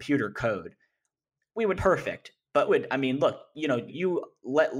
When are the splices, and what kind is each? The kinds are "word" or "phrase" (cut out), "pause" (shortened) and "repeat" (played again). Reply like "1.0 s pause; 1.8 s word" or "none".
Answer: 1.7 s phrase; 2.7 s word; 3.9 s word